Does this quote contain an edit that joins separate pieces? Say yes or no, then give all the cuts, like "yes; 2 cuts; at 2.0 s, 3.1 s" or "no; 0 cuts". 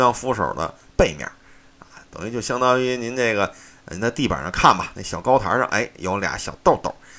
no; 0 cuts